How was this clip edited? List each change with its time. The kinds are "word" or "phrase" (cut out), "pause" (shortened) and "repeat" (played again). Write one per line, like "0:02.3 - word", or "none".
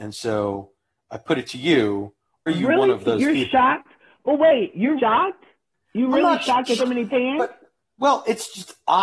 0:02.5 - word
0:05.0 - word
0:05.7 - pause
0:06.8 - phrase